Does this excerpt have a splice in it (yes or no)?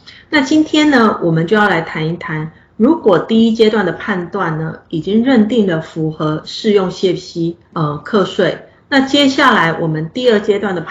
yes